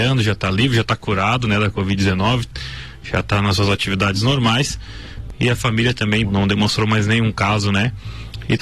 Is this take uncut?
no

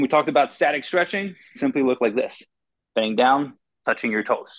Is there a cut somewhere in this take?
yes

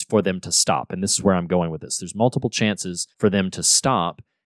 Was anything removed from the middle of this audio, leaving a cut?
yes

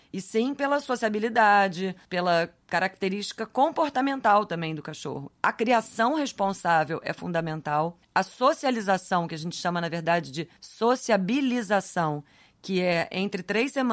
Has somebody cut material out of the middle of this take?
yes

